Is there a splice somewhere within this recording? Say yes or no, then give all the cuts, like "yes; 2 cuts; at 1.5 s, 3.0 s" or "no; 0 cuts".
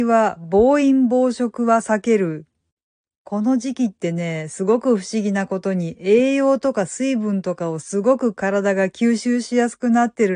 no; 0 cuts